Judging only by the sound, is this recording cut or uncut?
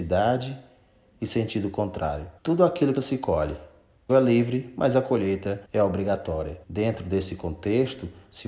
cut